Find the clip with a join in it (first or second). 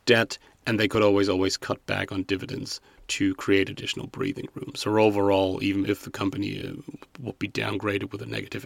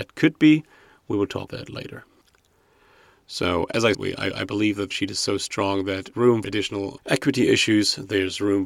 second